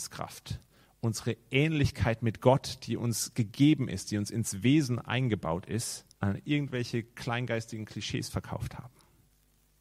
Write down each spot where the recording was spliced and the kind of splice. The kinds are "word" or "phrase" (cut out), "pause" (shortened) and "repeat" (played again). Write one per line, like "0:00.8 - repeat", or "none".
0:06.1 - pause